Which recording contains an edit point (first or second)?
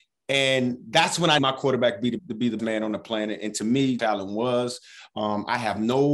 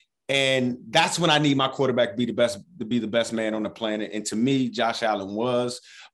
first